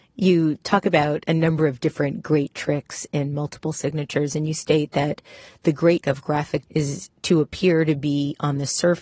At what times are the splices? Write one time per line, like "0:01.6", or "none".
0:06.0
0:06.7

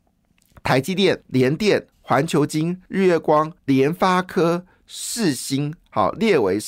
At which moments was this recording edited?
0:01.2
0:01.9
0:02.9
0:03.6

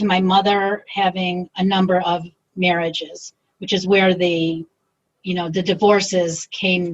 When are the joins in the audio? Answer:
none

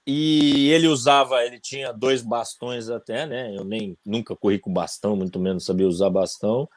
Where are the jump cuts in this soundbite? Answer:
none

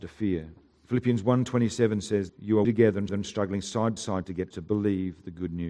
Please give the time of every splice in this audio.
0:02.3
0:02.6
0:03.1
0:04.0
0:04.5

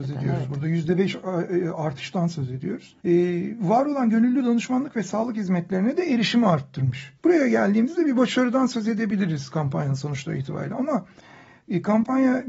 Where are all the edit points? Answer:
0:03.0
0:07.2

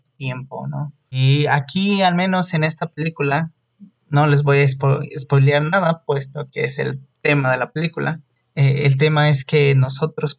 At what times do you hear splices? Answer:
none

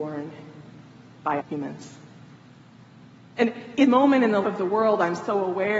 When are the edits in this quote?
0:01.4
0:03.8
0:04.4

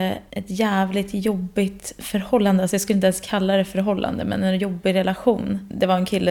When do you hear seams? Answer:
none

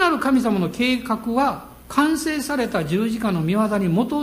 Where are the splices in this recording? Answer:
0:01.8

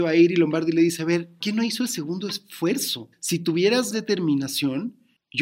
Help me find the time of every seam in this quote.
0:01.4
0:03.1
0:03.9

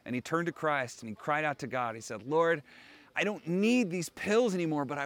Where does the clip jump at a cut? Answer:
none

